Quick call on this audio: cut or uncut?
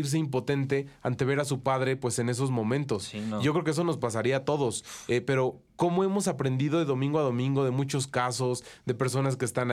uncut